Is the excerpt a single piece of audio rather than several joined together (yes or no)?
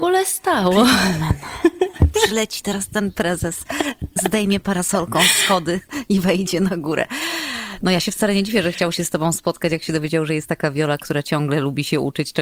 yes